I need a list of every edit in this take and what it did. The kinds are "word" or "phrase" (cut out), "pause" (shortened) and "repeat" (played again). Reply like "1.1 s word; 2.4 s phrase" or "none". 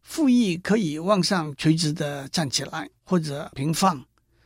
3.0 s pause